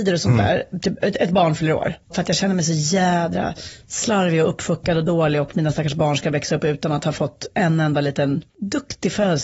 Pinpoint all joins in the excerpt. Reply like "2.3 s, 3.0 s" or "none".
2.0 s, 8.5 s